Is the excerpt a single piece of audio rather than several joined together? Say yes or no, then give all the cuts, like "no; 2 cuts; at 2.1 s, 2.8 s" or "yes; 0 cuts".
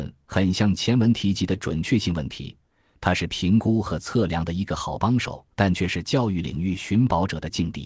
no; 1 cut; at 5.5 s